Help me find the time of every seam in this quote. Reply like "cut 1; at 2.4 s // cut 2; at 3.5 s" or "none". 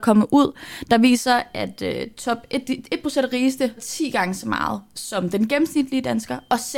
cut 1; at 3.8 s

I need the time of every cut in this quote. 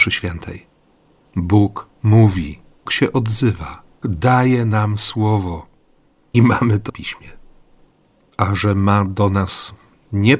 cut 1; at 2.9 s // cut 2; at 4.0 s // cut 3; at 6.3 s // cut 4; at 6.9 s

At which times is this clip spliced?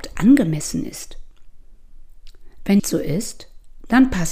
cut 1; at 2.8 s

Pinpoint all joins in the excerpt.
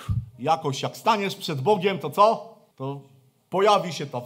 cut 1; at 2.7 s

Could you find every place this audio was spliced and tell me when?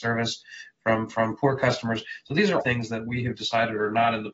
cut 1; at 2.6 s

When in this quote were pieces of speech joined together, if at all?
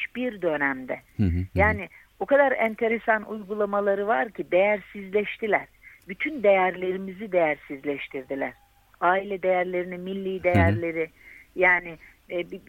none

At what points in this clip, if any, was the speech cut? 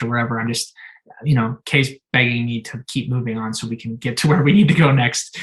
none

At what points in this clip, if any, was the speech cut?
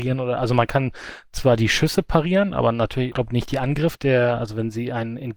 cut 1; at 3.1 s // cut 2; at 3.9 s

